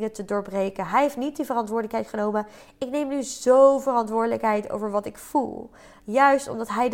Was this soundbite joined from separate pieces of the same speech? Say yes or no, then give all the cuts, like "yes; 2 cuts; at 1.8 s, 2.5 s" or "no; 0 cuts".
no; 0 cuts